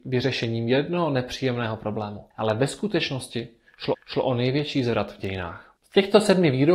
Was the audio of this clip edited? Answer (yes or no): yes